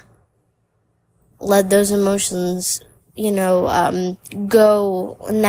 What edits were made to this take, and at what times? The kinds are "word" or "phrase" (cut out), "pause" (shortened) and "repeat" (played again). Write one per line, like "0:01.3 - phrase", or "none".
none